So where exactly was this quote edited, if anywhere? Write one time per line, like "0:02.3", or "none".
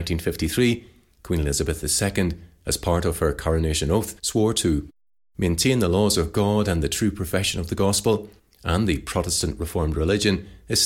0:04.2
0:08.4